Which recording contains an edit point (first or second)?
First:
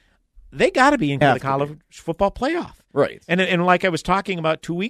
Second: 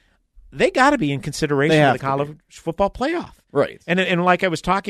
first